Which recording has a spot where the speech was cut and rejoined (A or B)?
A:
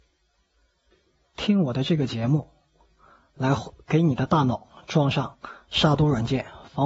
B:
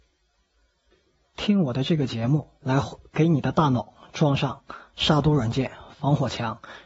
B